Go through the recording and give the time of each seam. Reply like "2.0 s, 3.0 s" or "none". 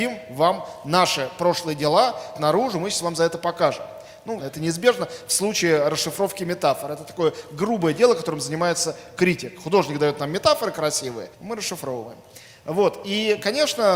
2.3 s, 4.4 s, 11.3 s